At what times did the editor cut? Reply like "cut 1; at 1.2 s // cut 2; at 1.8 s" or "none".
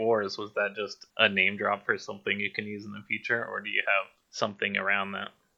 cut 1; at 1.1 s // cut 2; at 4.2 s